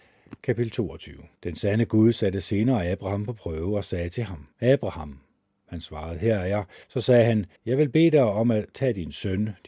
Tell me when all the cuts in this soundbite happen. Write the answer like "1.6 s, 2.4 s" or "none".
1.3 s, 4.5 s, 6.8 s, 7.6 s